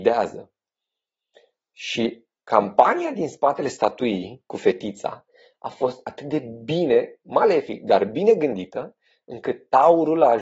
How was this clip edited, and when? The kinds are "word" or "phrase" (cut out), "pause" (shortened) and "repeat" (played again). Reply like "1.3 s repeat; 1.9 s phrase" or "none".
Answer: none